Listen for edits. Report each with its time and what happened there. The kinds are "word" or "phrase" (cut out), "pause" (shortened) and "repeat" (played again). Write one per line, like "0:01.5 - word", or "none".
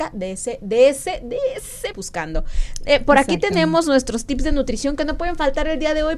0:01.9 - phrase